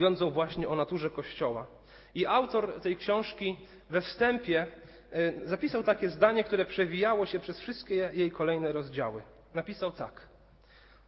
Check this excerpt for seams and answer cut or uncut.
uncut